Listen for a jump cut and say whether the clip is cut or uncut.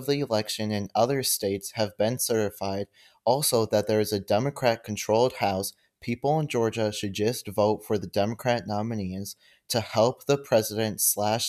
uncut